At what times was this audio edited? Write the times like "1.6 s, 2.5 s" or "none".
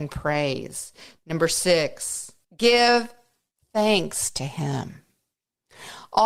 2.4 s